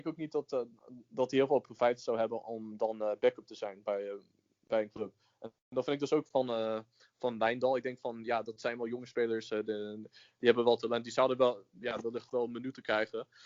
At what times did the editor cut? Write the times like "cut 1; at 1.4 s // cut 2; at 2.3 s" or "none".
none